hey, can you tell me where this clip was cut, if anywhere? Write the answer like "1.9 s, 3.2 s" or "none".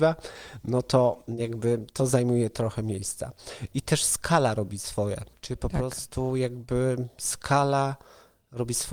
none